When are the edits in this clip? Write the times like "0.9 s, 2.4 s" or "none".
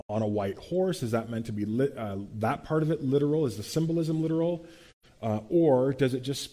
none